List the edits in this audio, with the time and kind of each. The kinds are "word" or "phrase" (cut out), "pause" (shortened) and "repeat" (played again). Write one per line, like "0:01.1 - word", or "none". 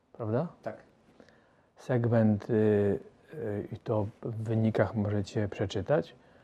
none

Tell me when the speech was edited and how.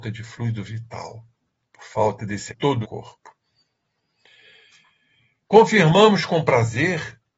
0:01.4 - pause
0:02.5 - phrase
0:02.8 - phrase

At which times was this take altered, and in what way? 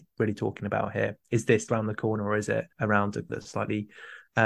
0:01.7 - word
0:02.7 - pause
0:03.3 - word

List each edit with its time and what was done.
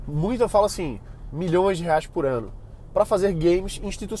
none

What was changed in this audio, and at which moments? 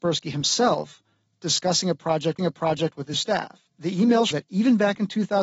0:02.4 - repeat
0:03.1 - word
0:03.7 - pause
0:04.3 - word

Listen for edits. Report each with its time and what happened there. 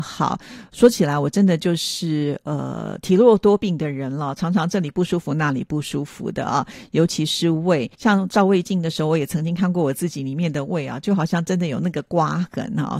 0:07.9 - pause

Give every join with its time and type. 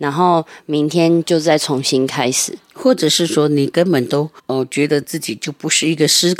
0:04.4 - pause

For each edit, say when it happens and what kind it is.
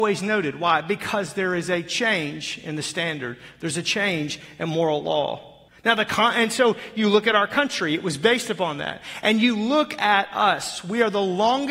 0:05.7 - pause

